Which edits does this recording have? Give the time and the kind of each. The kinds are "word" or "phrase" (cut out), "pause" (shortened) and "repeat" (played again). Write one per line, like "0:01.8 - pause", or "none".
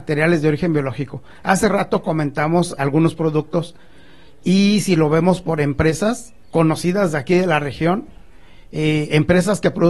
0:02.8 - word
0:06.5 - pause